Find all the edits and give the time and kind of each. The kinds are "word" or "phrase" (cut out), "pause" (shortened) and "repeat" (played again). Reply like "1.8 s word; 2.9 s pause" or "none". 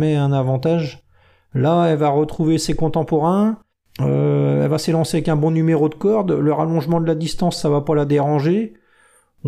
3.7 s pause